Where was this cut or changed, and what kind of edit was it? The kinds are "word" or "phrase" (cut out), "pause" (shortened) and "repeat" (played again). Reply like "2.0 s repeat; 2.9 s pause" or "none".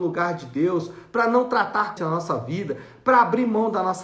2.0 s phrase